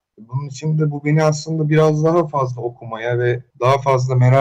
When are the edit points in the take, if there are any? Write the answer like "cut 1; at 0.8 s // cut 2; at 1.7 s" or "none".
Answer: cut 1; at 3.5 s